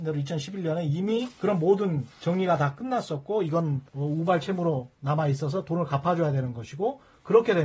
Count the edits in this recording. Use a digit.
3